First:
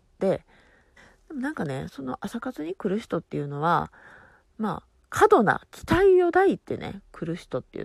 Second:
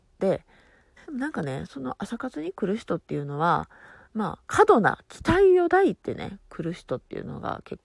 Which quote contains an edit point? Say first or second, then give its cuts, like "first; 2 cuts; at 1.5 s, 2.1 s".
second; 3 cuts; at 1.0 s, 4.0 s, 4.4 s